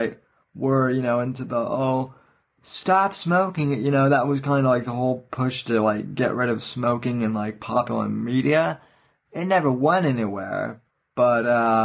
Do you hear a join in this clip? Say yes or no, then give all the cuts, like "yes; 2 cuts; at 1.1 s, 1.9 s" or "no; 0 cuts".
no; 0 cuts